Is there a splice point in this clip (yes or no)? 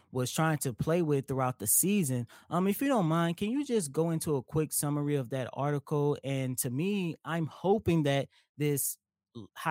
no